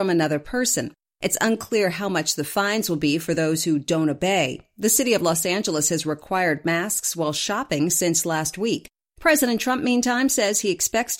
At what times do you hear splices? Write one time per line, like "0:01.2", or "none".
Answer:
none